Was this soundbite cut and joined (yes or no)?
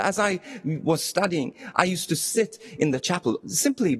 no